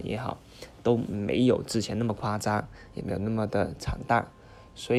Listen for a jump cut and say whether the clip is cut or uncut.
uncut